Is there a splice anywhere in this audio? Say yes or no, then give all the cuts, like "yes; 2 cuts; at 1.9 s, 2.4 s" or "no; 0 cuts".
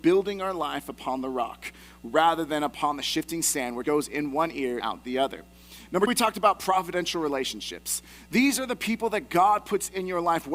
yes; 3 cuts; at 3.8 s, 4.8 s, 6.1 s